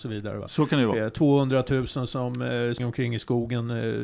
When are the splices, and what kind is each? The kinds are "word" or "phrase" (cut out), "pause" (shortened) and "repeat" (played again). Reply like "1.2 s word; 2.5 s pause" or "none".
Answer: 2.8 s word

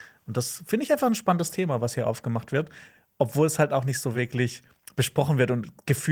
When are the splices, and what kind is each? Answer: none

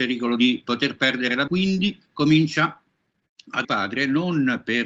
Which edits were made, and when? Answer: 1.5 s word; 2.1 s pause; 3.6 s phrase

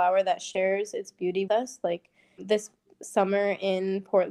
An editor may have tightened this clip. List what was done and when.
1.5 s word; 2.4 s word

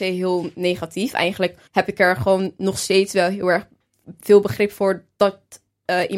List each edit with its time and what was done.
1.7 s pause

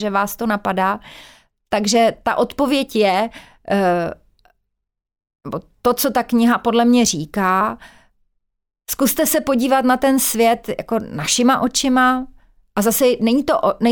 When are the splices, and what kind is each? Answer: none

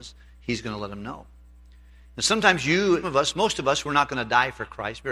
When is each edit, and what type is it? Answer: 3.0 s word

